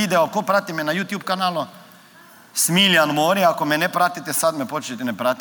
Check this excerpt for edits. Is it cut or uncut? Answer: uncut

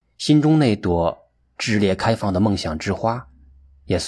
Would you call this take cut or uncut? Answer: cut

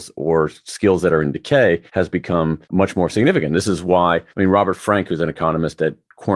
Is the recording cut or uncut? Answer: cut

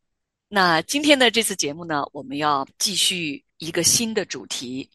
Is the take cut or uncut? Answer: cut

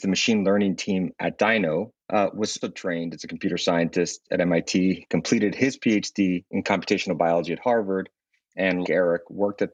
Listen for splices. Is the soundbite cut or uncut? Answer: cut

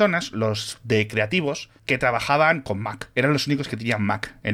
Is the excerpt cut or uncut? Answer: cut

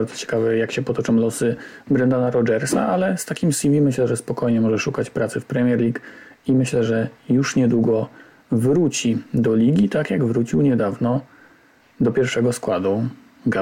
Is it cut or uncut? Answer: uncut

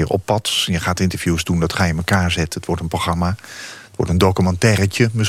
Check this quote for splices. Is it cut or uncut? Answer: uncut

